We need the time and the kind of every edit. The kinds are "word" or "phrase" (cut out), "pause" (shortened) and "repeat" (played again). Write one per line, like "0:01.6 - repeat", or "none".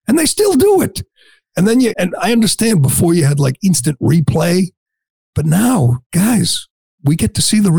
0:01.9 - word